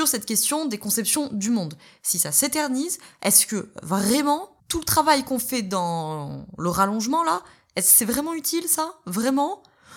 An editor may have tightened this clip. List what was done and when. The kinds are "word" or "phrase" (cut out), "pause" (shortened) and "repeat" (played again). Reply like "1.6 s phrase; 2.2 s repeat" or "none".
4.6 s pause